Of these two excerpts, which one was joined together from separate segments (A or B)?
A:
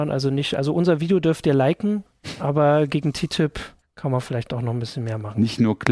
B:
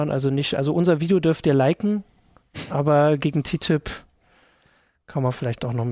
A